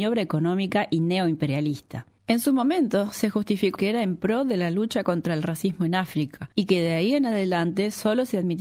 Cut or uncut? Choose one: cut